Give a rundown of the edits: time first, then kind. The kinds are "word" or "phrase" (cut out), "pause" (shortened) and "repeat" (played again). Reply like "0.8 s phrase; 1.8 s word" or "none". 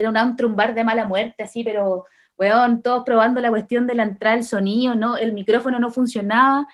none